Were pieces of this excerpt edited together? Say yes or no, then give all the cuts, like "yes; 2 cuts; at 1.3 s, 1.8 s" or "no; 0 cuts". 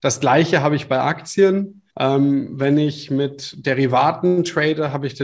yes; 1 cut; at 1.9 s